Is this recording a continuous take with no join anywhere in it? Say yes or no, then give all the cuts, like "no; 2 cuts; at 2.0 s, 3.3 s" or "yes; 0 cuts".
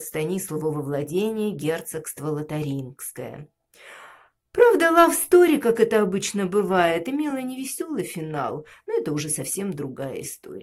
yes; 0 cuts